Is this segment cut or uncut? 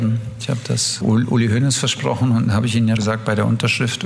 cut